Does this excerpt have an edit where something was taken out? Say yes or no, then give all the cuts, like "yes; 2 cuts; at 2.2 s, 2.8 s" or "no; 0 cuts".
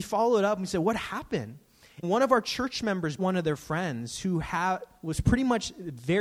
yes; 2 cuts; at 2.0 s, 3.2 s